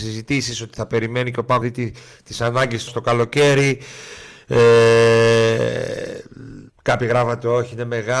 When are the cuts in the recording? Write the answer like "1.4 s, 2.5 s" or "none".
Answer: 1.6 s, 2.9 s, 6.7 s